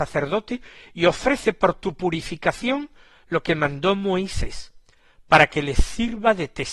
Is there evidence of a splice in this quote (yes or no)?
no